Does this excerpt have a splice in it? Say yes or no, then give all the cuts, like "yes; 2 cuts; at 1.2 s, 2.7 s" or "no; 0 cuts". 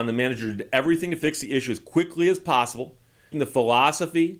yes; 1 cut; at 3.3 s